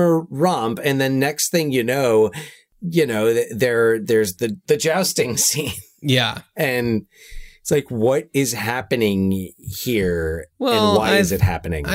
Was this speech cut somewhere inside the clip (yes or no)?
no